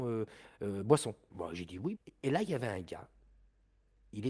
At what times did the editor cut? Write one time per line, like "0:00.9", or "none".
none